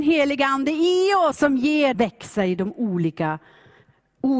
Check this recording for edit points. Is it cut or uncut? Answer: cut